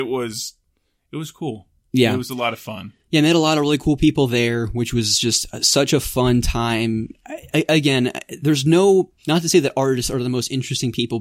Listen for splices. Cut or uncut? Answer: cut